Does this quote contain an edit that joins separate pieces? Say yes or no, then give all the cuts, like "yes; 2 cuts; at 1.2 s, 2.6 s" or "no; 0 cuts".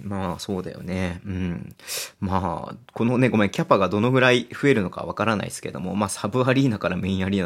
no; 0 cuts